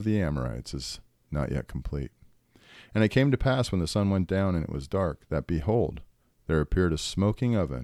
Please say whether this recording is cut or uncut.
uncut